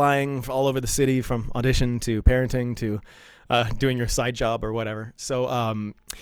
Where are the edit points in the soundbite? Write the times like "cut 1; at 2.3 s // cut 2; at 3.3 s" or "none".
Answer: none